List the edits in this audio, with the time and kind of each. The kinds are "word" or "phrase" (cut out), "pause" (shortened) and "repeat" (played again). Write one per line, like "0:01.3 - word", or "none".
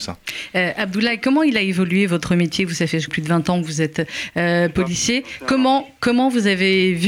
0:03.1 - phrase